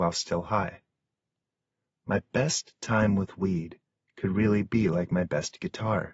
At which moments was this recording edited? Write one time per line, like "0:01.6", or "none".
none